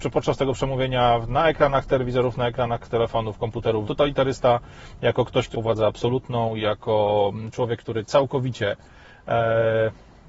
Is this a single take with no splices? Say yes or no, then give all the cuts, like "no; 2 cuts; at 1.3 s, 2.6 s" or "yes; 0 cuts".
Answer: no; 2 cuts; at 3.8 s, 5.5 s